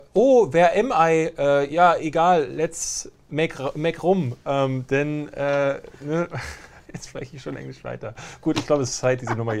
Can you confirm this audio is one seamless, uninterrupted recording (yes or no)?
no